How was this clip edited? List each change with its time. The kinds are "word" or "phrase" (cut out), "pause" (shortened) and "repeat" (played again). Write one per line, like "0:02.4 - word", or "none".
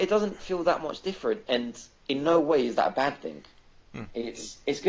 none